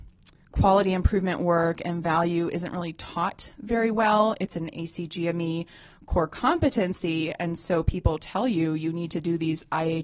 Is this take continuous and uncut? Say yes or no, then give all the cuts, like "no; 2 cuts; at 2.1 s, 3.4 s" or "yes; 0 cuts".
yes; 0 cuts